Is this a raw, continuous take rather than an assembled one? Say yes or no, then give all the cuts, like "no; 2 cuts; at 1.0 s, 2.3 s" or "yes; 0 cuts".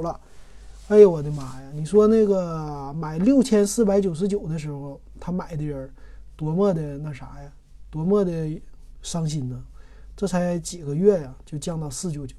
yes; 0 cuts